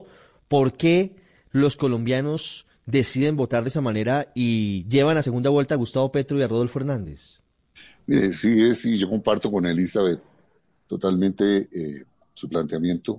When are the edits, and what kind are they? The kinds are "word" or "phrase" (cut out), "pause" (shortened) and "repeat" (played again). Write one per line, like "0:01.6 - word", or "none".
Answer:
none